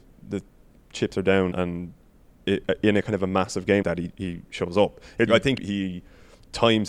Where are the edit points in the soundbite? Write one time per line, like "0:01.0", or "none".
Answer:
0:01.5
0:03.8
0:05.3
0:05.6